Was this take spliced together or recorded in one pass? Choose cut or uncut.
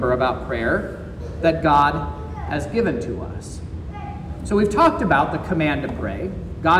uncut